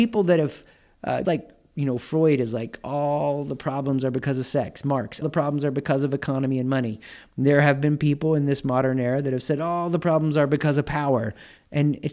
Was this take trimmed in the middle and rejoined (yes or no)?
yes